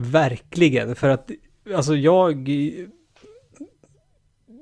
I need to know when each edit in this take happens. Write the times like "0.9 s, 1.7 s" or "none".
none